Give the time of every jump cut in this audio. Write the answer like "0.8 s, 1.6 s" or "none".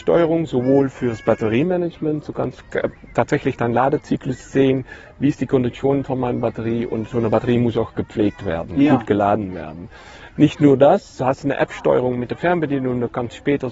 none